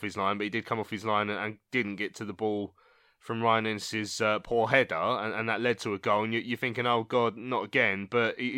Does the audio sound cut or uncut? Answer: uncut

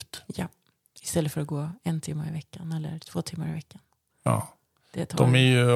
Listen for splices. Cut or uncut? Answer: uncut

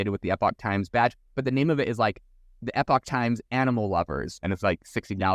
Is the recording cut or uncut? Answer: uncut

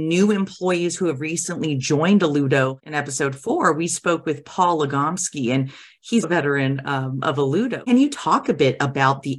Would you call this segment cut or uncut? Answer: cut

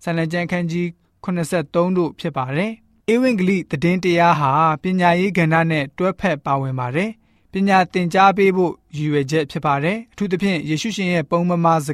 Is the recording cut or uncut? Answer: uncut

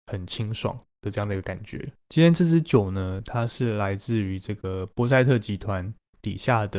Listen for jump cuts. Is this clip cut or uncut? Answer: cut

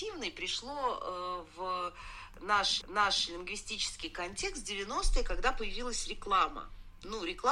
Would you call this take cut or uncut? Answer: cut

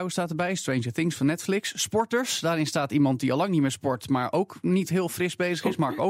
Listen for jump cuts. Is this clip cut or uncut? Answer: uncut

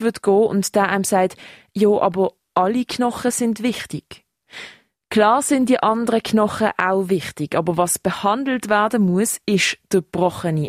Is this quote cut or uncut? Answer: uncut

